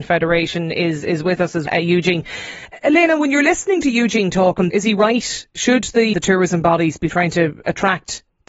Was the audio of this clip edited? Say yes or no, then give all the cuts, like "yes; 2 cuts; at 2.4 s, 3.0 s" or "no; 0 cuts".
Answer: yes; 3 cuts; at 1.7 s, 4.7 s, 6.1 s